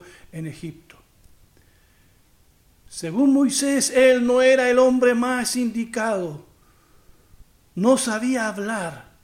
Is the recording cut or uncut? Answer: uncut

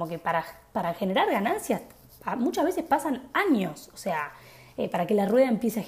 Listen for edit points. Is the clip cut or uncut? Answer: uncut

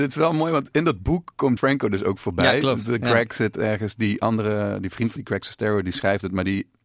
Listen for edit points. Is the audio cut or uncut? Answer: cut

